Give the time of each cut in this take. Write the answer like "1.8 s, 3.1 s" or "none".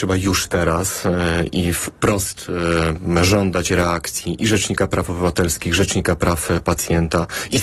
none